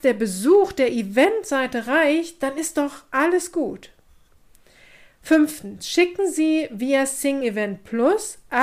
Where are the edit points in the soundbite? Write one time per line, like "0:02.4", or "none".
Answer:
none